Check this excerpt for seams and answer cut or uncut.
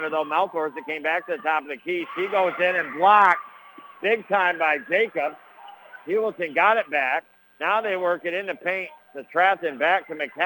cut